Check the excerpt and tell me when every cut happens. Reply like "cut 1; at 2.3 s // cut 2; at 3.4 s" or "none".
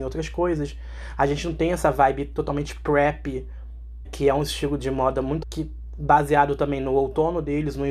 cut 1; at 4.0 s // cut 2; at 5.4 s